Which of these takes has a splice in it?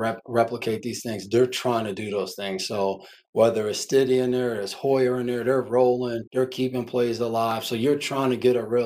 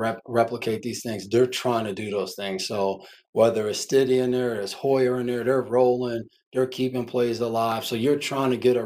first; 1 cut; at 6.3 s

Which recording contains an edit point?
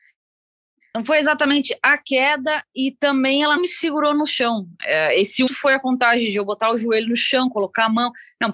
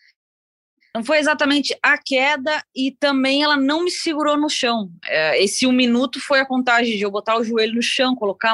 first; 2 cuts; at 3.6 s, 5.5 s

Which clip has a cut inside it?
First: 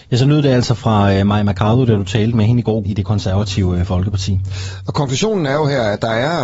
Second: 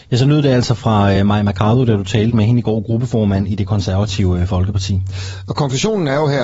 first; 1 cut; at 2.8 s

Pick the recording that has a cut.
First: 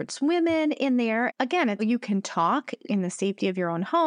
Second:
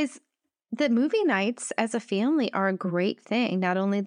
first; 1 cut; at 1.8 s

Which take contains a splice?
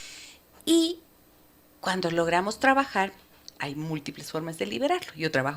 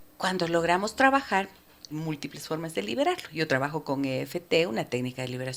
second; 1 cut; at 1.9 s

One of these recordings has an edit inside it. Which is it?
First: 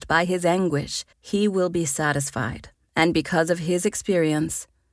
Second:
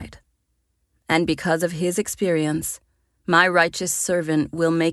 first; 2 cuts; at 1.1 s, 2.8 s

